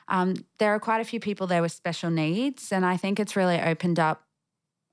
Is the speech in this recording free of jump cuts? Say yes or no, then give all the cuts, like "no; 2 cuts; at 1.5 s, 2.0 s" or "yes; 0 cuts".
yes; 0 cuts